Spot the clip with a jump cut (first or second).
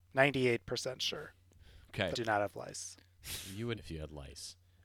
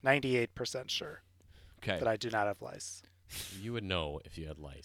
first